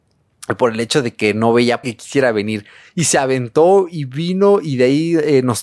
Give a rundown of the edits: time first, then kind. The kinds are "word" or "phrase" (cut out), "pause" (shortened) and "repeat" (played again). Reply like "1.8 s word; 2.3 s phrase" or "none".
1.8 s word